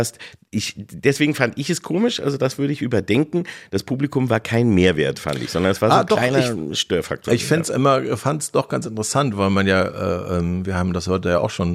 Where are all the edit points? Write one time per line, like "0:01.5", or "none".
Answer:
none